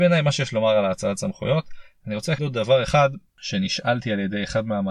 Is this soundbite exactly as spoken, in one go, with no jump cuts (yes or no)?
no